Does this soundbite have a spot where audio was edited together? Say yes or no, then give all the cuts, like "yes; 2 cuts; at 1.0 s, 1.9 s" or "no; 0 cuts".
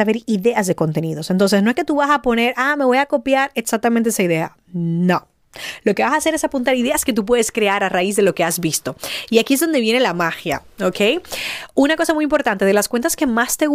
no; 0 cuts